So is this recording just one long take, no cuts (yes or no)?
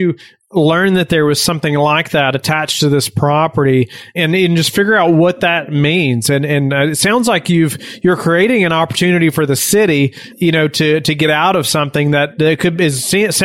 yes